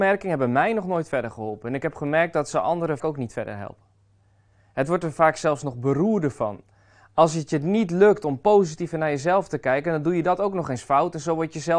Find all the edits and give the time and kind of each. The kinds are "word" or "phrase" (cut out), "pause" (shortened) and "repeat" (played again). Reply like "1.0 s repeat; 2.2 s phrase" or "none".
3.0 s word